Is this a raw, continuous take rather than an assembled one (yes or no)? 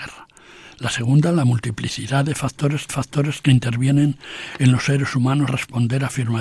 no